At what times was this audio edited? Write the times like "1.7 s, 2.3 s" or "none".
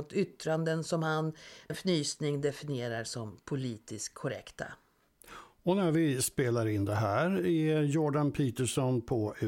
1.7 s